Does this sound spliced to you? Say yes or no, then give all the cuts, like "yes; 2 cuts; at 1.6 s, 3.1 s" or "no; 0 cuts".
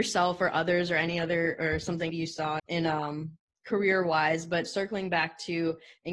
yes; 2 cuts; at 2.1 s, 2.6 s